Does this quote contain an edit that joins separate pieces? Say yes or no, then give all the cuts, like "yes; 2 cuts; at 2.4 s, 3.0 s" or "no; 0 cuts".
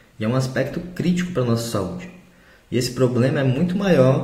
no; 0 cuts